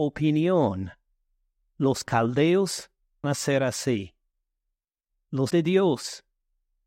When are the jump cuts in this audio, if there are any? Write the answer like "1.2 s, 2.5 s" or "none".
3.2 s, 5.5 s